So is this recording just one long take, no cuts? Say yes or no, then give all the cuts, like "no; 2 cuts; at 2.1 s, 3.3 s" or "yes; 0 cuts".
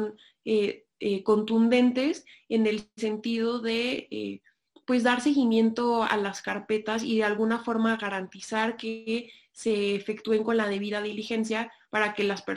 yes; 0 cuts